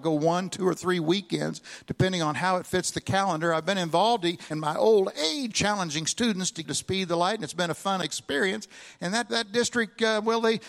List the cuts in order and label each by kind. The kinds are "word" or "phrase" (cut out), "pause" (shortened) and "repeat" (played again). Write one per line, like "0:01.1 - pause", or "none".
0:04.5 - word
0:05.5 - word
0:06.6 - word
0:09.3 - word